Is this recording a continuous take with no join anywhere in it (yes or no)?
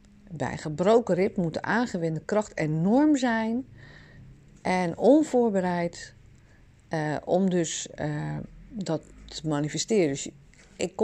yes